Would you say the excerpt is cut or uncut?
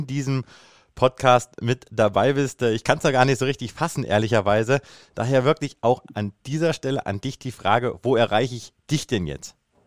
uncut